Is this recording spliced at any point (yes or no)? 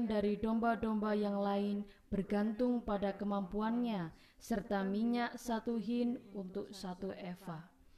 no